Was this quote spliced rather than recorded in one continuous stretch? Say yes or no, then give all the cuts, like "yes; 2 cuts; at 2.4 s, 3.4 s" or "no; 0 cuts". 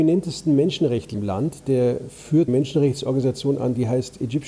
yes; 2 cuts; at 1.1 s, 2.5 s